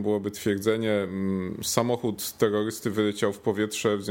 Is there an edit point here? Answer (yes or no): no